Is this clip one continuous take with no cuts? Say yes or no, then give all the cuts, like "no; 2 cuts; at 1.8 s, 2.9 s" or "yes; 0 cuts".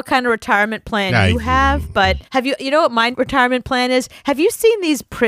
no; 2 cuts; at 2.2 s, 3.1 s